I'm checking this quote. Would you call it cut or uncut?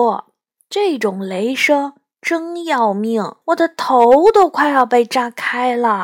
cut